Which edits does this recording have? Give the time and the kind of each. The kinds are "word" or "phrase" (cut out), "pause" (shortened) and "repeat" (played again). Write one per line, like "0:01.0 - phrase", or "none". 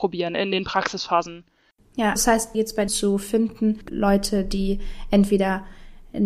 0:02.2 - word
0:02.5 - word
0:02.9 - phrase
0:03.9 - word